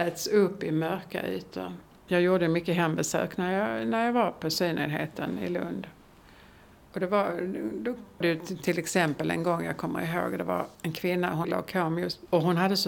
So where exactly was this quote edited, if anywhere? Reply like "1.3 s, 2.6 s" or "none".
8.2 s, 10.7 s, 11.4 s